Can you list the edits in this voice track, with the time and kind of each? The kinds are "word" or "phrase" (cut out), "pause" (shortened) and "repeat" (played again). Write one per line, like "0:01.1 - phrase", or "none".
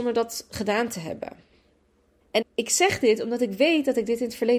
0:02.4 - word

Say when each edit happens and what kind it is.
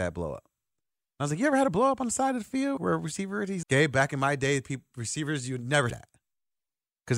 0:02.8 - word
0:03.6 - word
0:05.9 - word

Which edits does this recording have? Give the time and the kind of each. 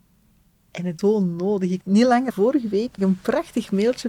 0:01.0 - word
0:01.8 - word
0:02.3 - word
0:03.0 - word

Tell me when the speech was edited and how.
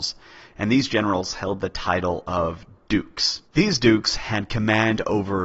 0:03.5 - pause

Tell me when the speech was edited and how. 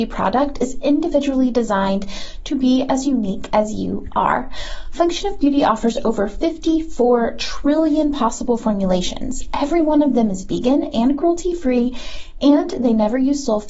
none

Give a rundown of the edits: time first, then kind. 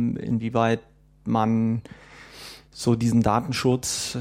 none

